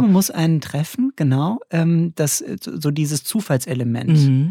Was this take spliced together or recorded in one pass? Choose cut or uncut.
uncut